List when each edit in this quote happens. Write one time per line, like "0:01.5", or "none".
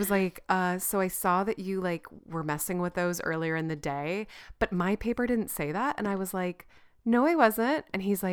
none